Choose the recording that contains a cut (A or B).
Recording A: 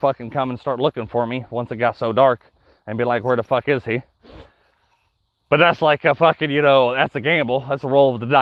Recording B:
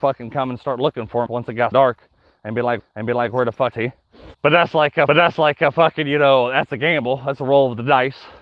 B